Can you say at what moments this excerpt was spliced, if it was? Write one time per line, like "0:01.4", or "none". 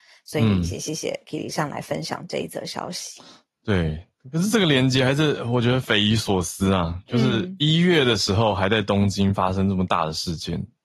none